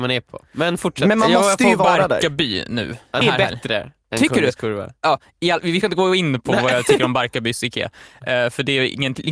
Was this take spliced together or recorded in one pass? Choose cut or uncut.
cut